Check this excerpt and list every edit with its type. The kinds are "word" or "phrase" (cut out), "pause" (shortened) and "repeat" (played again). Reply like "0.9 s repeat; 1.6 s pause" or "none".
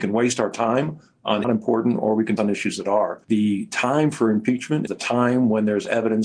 1.4 s phrase; 2.4 s word; 3.2 s pause; 4.9 s word